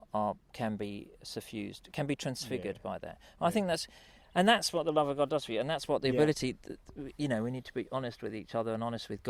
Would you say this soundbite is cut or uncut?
uncut